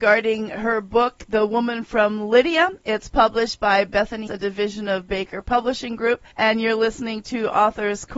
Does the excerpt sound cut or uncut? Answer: cut